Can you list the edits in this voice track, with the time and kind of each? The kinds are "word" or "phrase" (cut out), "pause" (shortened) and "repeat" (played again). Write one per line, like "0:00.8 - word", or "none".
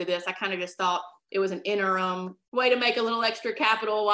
0:02.4 - pause